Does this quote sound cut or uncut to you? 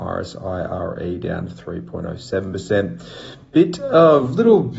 uncut